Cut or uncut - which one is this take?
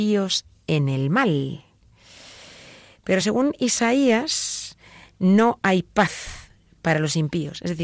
uncut